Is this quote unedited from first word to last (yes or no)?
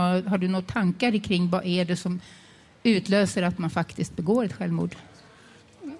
yes